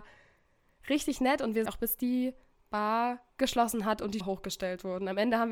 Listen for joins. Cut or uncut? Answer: cut